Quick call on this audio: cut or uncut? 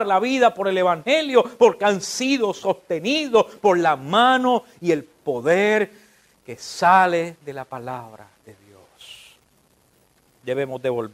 uncut